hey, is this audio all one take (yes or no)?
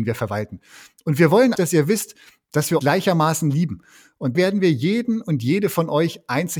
no